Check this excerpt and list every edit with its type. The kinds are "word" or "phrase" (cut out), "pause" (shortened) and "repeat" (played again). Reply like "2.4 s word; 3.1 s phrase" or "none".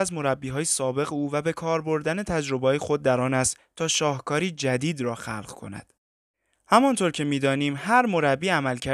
none